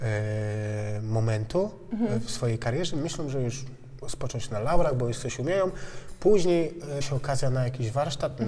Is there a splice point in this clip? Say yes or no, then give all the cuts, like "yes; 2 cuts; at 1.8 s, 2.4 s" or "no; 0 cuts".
yes; 2 cuts; at 4.0 s, 7.0 s